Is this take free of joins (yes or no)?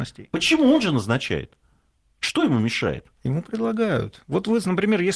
yes